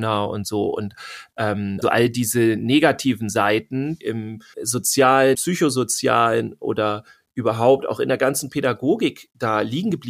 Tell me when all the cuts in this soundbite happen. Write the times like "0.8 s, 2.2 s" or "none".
1.8 s, 4.0 s, 4.5 s, 5.3 s

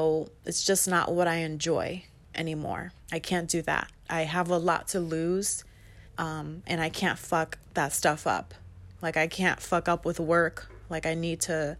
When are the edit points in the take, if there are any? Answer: 3.0 s, 6.1 s, 7.7 s, 9.0 s

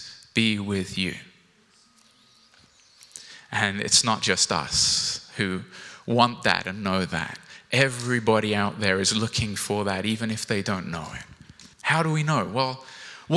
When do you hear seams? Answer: 11.7 s

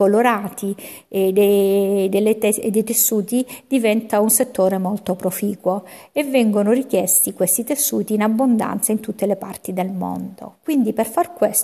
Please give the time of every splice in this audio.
none

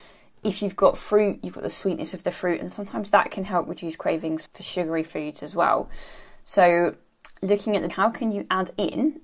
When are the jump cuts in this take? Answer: 4.5 s, 7.9 s

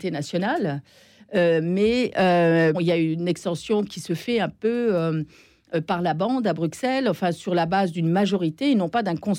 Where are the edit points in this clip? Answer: 2.7 s

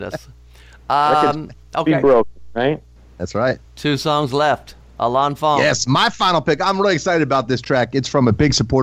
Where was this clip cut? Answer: 3.0 s, 3.7 s

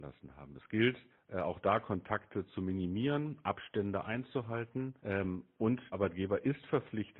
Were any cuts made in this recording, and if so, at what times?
1.1 s, 5.0 s, 5.9 s

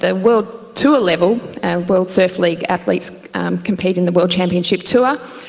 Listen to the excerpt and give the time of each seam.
none

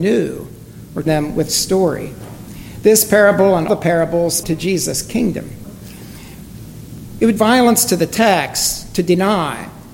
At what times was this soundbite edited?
1.1 s, 1.5 s, 3.7 s, 4.4 s, 7.4 s

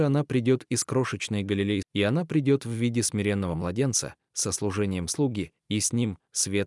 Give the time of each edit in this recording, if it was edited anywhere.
1.8 s

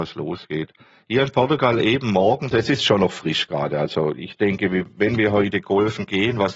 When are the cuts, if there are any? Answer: 2.5 s

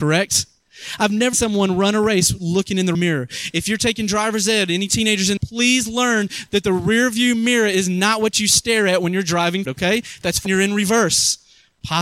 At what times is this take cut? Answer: 1.3 s, 2.9 s, 5.4 s, 9.7 s, 10.5 s

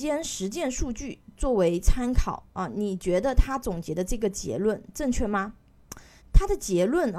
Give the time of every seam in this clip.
6.2 s

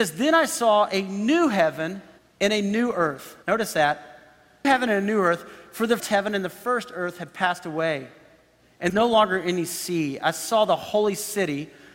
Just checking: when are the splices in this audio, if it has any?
2.2 s, 3.4 s, 4.6 s, 6.0 s, 8.9 s

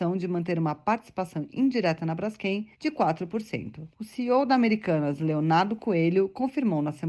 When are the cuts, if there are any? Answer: 2.7 s, 3.9 s

